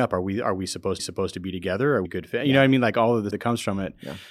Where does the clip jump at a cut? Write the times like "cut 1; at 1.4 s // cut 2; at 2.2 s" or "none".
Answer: cut 1; at 1.0 s // cut 2; at 2.0 s // cut 3; at 3.3 s

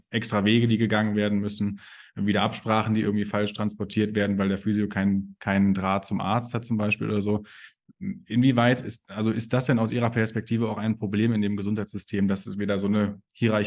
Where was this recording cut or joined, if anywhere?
none

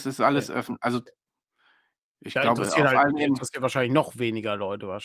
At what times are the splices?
none

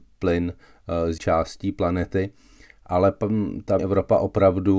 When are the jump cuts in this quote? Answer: cut 1; at 1.2 s // cut 2; at 3.8 s

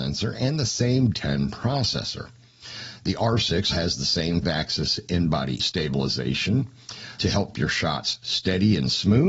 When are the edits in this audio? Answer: cut 1; at 1.1 s // cut 2; at 3.7 s // cut 3; at 4.4 s // cut 4; at 5.6 s // cut 5; at 7.2 s // cut 6; at 7.5 s

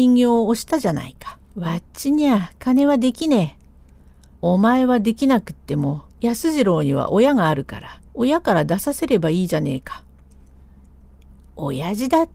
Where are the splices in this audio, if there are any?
cut 1; at 1.4 s // cut 2; at 4.3 s // cut 3; at 6.1 s // cut 4; at 8.1 s

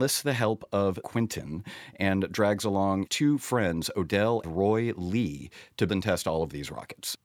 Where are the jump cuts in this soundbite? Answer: cut 1; at 1.0 s // cut 2; at 3.1 s // cut 3; at 4.4 s // cut 4; at 5.9 s

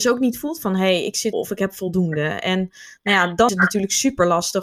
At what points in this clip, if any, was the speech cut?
cut 1; at 1.3 s // cut 2; at 3.5 s

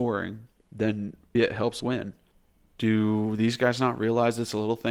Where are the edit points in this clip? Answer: cut 1; at 1.3 s // cut 2; at 1.8 s // cut 3; at 2.3 s

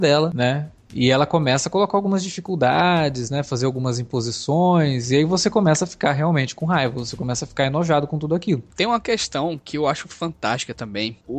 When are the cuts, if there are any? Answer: none

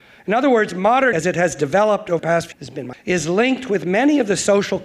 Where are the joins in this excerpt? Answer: cut 1; at 1.1 s // cut 2; at 2.2 s // cut 3; at 2.5 s // cut 4; at 2.9 s

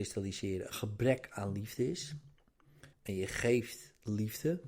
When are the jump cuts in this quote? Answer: cut 1; at 2.9 s

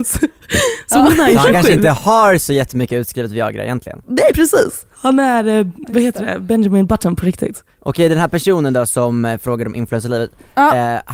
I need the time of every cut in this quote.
cut 1; at 4.3 s // cut 2; at 4.9 s

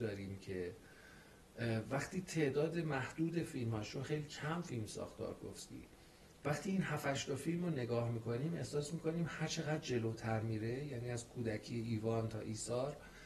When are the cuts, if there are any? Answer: none

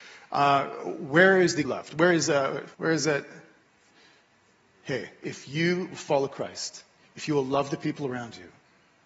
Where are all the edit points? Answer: cut 1; at 1.6 s // cut 2; at 2.7 s

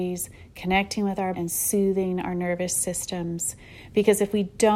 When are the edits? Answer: cut 1; at 1.3 s

